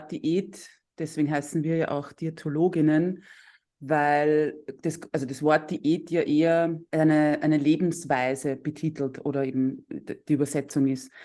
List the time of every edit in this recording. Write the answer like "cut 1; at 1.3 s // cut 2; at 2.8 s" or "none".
cut 1; at 6.9 s